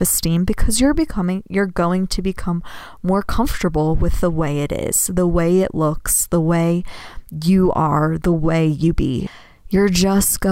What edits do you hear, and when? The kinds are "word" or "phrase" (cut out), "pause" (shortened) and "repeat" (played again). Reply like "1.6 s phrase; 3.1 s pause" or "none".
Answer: none

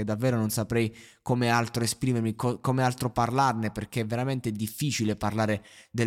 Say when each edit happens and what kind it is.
none

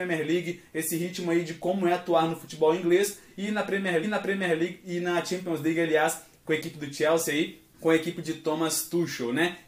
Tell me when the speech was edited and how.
4.0 s repeat; 7.7 s pause

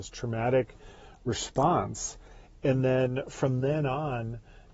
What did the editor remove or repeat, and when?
none

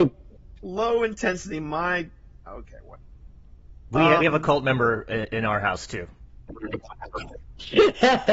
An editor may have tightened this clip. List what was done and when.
2.5 s word; 4.2 s word

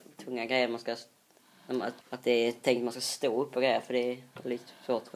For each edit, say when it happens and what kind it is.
2.0 s pause

